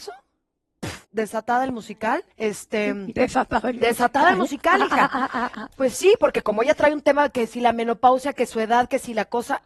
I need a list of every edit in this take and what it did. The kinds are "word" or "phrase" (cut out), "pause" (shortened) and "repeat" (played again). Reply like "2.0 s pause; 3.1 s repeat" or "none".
1.0 s pause; 2.3 s pause